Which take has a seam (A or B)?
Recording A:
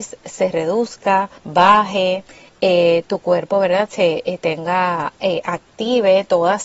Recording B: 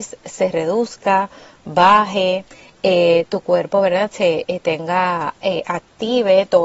A